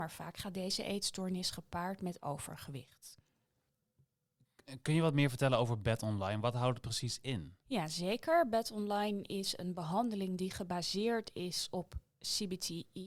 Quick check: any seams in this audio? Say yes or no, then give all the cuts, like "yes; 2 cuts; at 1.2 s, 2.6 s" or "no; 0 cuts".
yes; 1 cut; at 7.6 s